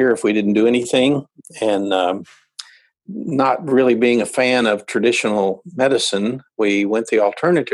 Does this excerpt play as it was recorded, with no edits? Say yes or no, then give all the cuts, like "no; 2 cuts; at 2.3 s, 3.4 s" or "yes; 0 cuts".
yes; 0 cuts